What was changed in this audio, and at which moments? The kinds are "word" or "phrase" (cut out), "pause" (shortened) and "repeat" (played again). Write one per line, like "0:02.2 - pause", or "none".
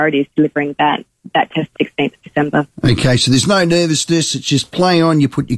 0:01.7 - phrase
0:02.7 - pause